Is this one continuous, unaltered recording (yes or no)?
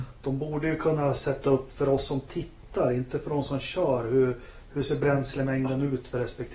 yes